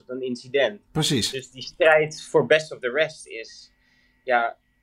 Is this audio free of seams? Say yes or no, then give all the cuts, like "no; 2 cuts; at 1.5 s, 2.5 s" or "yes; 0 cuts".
yes; 0 cuts